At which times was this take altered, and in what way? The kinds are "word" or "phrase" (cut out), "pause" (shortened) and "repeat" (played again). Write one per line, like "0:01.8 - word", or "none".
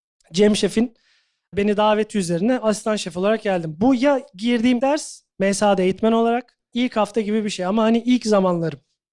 0:04.8 - word
0:06.7 - phrase